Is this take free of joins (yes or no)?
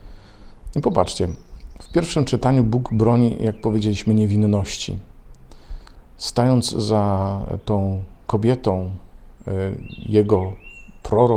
yes